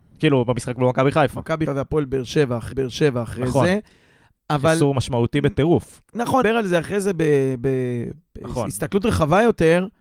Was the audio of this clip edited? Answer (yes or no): yes